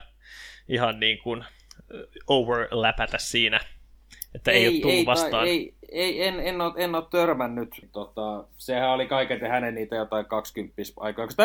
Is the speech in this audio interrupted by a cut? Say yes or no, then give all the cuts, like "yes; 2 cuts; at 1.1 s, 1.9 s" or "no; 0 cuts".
no; 0 cuts